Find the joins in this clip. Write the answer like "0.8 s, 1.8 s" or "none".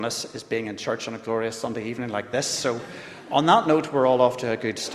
none